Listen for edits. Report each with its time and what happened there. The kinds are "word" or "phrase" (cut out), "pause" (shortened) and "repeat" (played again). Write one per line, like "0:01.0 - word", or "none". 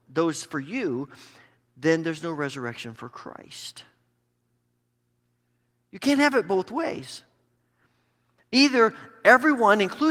none